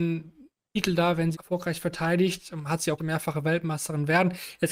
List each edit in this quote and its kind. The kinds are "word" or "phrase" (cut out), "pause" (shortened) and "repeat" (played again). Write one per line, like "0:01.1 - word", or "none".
0:01.3 - phrase
0:03.0 - phrase